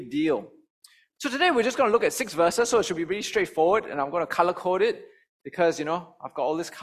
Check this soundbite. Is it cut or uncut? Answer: uncut